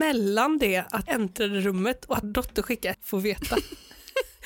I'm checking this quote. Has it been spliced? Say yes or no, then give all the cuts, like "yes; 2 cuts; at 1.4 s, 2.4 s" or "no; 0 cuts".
yes; 3 cuts; at 1.1 s, 2.2 s, 2.9 s